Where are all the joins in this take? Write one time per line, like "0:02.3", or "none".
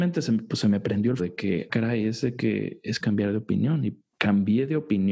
0:01.2
0:01.7
0:03.0
0:04.1

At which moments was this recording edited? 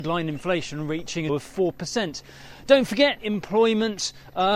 0:01.3
0:03.2

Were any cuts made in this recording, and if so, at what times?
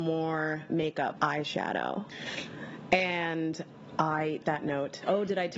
0:01.1
0:04.4

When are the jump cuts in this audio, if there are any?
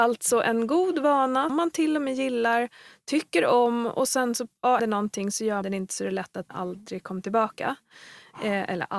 0:01.5
0:04.8
0:05.6
0:06.5

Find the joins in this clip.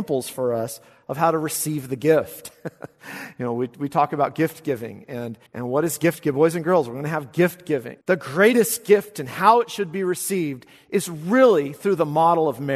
0:05.5
0:08.0

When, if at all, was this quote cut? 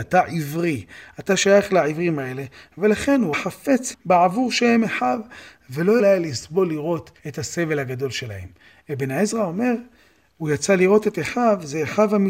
0:03.3
0:03.9
0:05.5
0:06.0
0:07.2

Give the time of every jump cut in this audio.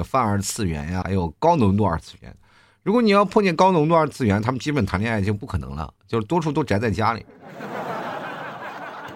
0:01.0

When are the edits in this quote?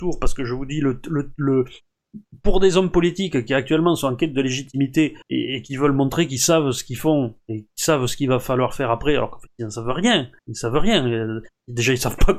0:05.2
0:10.4

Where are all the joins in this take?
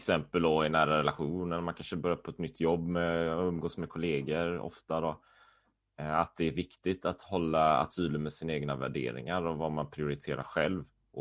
0:07.9

